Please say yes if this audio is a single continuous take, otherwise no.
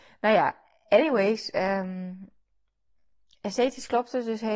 yes